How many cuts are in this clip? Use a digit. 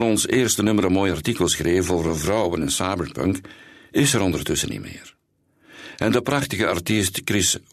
0